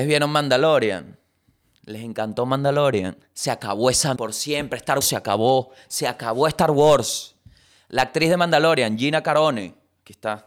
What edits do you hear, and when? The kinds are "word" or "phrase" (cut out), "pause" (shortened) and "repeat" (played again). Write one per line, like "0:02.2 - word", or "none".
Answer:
0:04.2 - word
0:05.0 - word